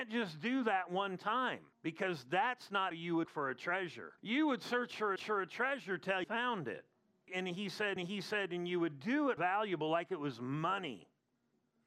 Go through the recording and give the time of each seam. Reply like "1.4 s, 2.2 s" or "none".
1.7 s, 2.9 s, 3.2 s, 4.2 s, 5.2 s, 6.2 s, 8.0 s, 9.4 s